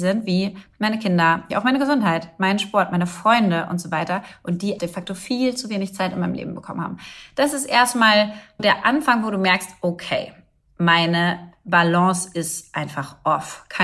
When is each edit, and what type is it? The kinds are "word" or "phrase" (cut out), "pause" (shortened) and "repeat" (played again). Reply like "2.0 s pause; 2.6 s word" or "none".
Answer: 1.5 s word; 4.8 s word; 8.6 s word